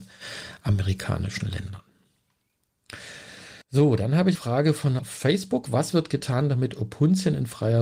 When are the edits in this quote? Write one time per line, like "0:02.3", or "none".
0:03.6
0:04.3
0:05.0

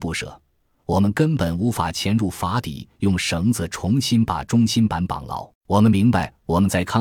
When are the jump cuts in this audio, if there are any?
0:05.5

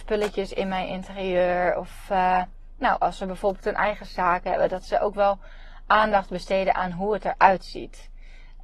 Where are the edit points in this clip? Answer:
none

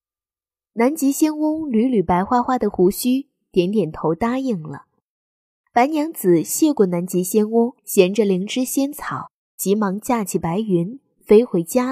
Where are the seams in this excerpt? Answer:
0:07.8

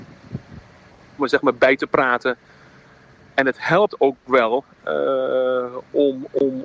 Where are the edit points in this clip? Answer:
0:01.2

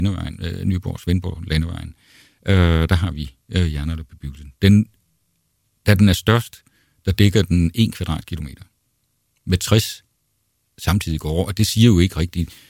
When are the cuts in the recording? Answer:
none

